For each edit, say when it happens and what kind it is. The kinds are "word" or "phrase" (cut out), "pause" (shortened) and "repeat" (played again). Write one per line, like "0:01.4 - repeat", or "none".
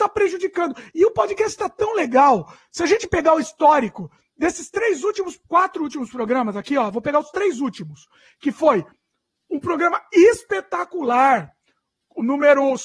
0:05.4 - pause